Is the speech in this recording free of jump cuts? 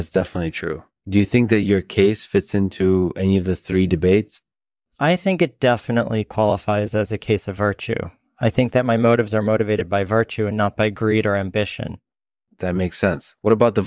yes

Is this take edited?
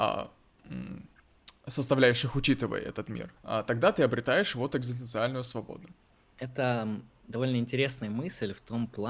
yes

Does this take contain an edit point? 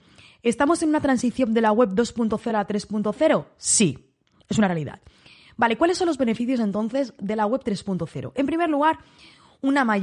no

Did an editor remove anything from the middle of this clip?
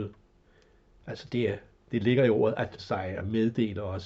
yes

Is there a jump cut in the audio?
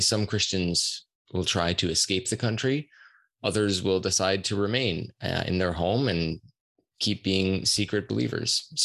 no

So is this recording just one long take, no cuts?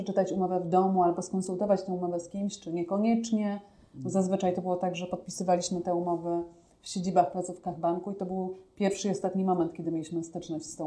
yes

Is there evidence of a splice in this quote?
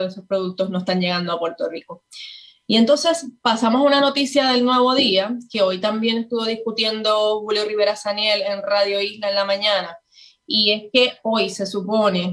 no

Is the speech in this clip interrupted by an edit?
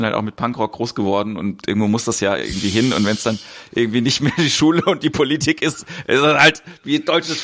no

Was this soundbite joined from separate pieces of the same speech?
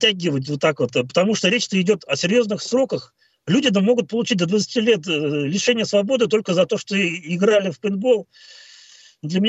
no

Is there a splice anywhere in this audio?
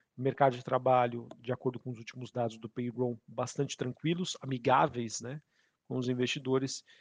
no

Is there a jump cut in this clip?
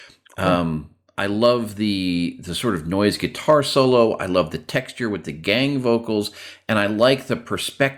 no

